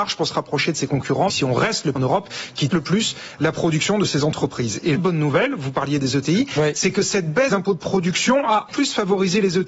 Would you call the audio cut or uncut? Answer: cut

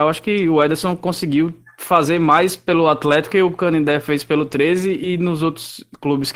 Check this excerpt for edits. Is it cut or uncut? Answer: cut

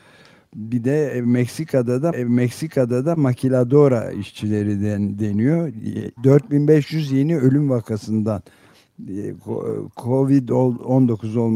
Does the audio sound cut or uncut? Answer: cut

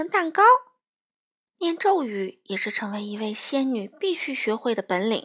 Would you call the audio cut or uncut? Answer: uncut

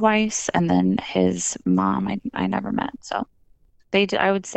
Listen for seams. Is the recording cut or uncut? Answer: uncut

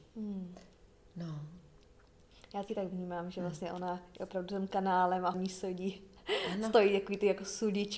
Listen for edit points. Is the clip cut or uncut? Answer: cut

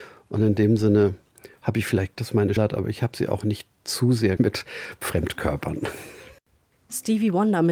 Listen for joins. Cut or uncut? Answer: cut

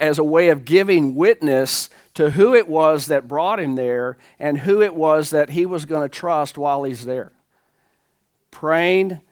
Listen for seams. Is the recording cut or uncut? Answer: uncut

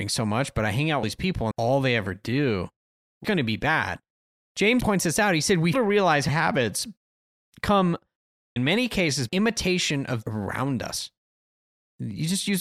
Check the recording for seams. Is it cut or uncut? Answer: cut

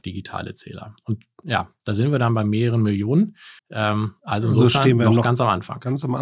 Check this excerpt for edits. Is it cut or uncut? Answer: cut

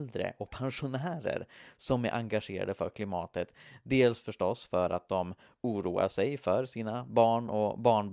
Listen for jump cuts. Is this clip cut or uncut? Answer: uncut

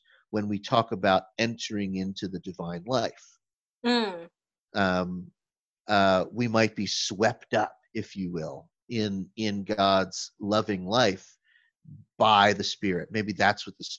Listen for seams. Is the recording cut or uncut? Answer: uncut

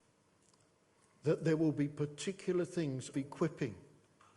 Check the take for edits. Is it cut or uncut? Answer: cut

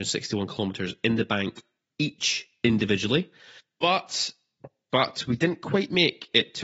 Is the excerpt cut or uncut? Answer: uncut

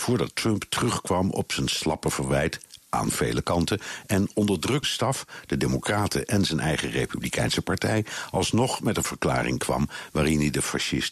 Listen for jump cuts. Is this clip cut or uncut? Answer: cut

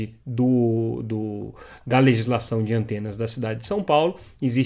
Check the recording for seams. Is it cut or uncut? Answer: uncut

